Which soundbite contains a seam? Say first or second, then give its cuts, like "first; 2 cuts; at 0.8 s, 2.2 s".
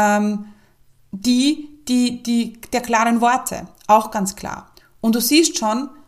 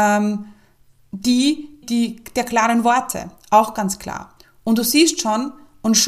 second; 1 cut; at 1.8 s